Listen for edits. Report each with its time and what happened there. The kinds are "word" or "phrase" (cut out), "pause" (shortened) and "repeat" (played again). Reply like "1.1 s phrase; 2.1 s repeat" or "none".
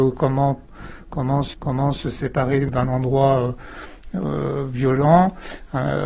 1.5 s repeat